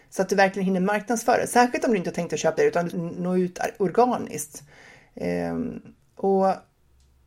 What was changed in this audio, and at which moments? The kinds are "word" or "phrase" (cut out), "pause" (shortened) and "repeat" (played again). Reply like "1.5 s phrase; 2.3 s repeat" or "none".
2.6 s word; 2.9 s word